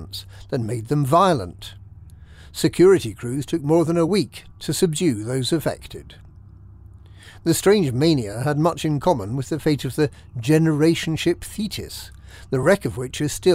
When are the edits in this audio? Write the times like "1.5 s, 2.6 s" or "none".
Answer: none